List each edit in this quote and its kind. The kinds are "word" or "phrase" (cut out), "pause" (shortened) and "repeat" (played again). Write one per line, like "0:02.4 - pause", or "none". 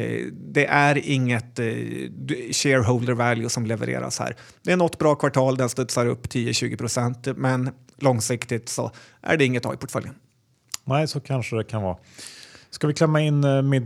none